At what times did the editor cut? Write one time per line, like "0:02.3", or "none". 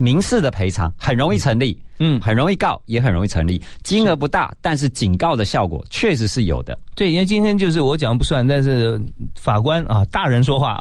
0:02.2

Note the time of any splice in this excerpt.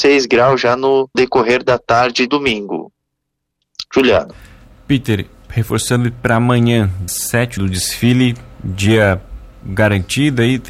0:01.1
0:02.3
0:07.1
0:07.6

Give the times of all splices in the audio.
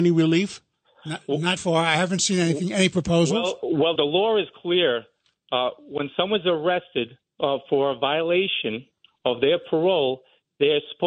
0:01.6
0:04.0
0:07.2

